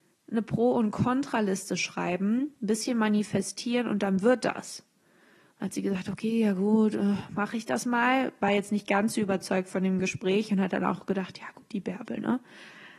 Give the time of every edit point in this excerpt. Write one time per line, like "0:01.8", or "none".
none